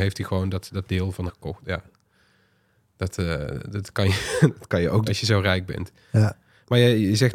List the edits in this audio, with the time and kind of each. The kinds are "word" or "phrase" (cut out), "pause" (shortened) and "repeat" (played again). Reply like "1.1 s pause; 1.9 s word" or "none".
1.3 s word; 5.1 s word